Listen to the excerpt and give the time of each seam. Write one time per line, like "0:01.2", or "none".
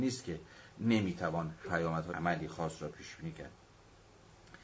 0:01.6
0:02.1